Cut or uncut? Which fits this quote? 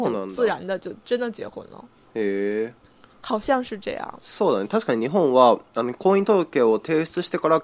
uncut